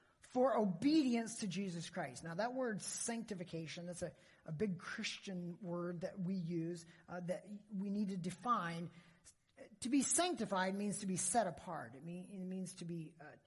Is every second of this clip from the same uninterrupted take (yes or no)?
yes